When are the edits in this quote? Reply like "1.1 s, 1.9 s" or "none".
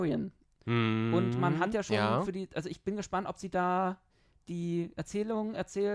none